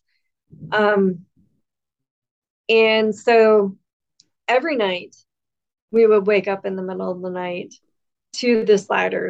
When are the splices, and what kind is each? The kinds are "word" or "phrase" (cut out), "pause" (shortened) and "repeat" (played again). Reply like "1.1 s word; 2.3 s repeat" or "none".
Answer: none